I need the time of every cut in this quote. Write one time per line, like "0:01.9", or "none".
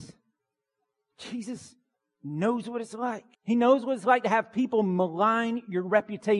0:03.3

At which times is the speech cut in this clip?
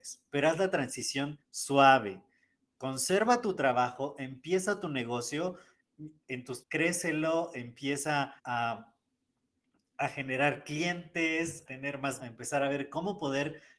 0:01.4
0:06.6
0:08.4
0:11.7
0:12.2

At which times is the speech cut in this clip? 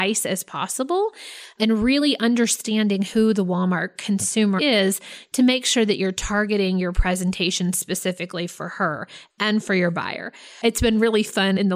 0:04.6

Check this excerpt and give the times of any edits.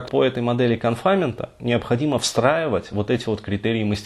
none

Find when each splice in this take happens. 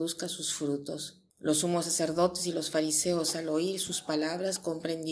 0:01.3

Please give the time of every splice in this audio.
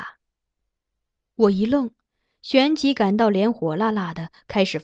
none

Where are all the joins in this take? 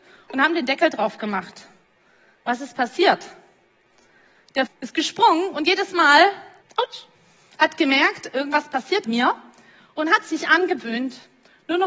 0:04.7
0:06.6
0:09.0

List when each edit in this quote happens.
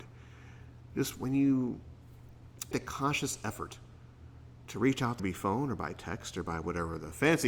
0:02.7
0:05.2

